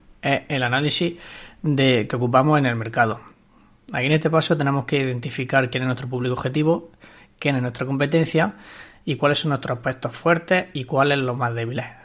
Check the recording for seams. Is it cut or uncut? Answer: uncut